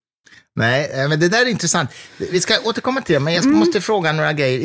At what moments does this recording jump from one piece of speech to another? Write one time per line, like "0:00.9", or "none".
none